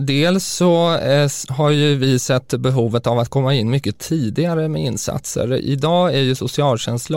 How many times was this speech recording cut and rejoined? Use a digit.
0